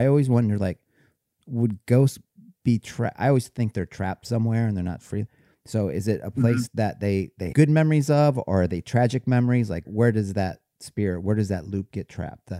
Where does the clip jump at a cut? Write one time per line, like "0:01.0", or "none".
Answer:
0:07.5
0:09.8